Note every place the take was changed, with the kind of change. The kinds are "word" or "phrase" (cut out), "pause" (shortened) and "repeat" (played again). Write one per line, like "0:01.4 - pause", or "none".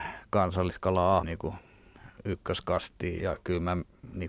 0:01.2 - word
0:03.2 - word